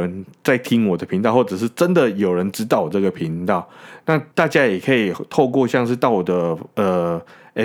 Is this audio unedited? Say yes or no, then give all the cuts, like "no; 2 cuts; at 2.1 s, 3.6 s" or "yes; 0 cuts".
no; 1 cut; at 4.3 s